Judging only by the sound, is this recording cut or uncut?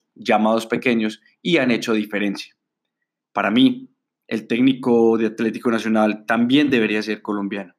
uncut